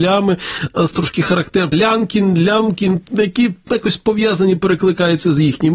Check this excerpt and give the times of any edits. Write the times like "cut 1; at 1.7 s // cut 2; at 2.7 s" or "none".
cut 1; at 0.9 s // cut 2; at 1.7 s